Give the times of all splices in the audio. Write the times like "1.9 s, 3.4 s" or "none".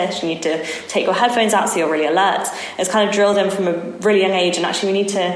none